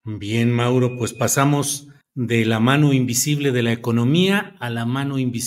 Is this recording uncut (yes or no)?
no